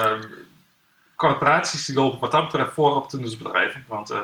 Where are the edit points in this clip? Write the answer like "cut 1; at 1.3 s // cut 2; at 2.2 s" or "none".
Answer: none